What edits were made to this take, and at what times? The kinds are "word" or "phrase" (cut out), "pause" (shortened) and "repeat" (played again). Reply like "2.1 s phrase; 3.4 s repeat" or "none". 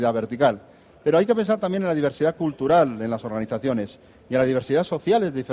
none